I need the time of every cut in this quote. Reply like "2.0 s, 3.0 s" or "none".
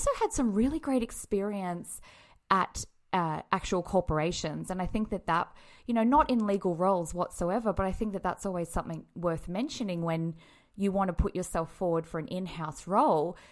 none